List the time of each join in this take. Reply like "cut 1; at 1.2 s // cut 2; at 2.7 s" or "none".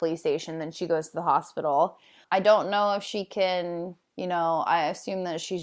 cut 1; at 2.2 s